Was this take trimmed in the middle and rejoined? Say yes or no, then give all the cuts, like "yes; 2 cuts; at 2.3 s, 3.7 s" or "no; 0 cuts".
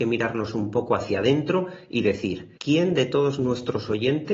yes; 1 cut; at 2.6 s